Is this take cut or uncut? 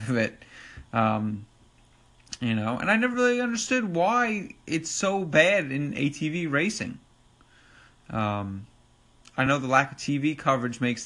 uncut